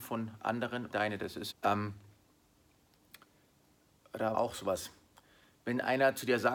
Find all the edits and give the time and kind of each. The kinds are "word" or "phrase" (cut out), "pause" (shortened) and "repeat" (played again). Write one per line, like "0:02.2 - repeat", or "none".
0:00.9 - word
0:01.5 - word
0:04.3 - word